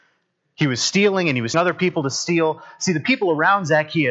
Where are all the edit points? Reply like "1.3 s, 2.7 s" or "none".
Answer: 1.5 s